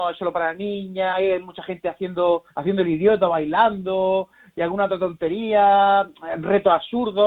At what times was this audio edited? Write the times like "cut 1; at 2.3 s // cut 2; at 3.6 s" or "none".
cut 1; at 1.1 s // cut 2; at 2.5 s